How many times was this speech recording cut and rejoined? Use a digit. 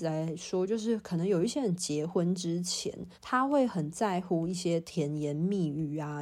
1